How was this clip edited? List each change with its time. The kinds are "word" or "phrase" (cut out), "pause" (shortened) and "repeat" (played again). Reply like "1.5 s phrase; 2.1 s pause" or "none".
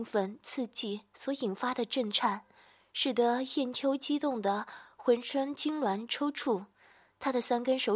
none